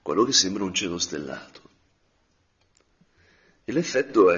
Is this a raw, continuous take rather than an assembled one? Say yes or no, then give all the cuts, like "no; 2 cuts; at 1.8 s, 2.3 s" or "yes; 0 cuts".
yes; 0 cuts